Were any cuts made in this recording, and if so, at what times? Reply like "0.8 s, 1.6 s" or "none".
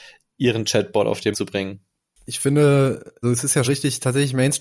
1.3 s, 3.2 s, 3.6 s